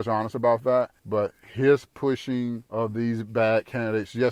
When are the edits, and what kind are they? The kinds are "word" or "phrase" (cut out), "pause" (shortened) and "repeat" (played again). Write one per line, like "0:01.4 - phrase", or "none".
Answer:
0:01.0 - pause
0:02.7 - pause